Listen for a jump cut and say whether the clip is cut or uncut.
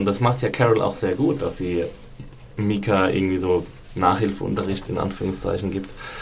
uncut